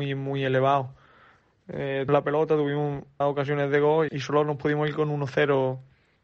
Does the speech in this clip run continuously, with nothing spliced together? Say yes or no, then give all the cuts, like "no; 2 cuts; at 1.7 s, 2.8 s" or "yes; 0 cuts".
no; 3 cuts; at 2.1 s, 3.2 s, 4.1 s